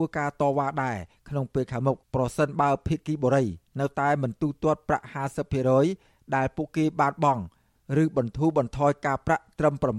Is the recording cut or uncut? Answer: cut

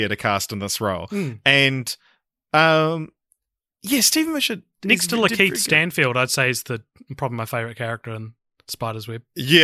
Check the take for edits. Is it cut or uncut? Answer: uncut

